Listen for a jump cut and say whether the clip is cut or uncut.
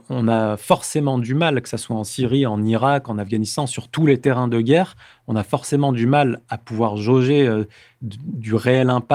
uncut